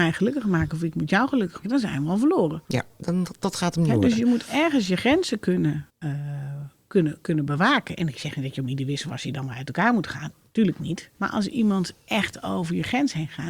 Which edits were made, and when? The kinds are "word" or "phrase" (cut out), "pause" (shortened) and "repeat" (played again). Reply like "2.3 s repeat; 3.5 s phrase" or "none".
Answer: 1.6 s word; 2.6 s pause; 5.9 s pause; 11.1 s pause; 12.0 s pause